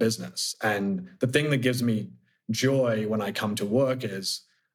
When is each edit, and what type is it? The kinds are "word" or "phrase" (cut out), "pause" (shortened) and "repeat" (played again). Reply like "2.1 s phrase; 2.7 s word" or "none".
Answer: none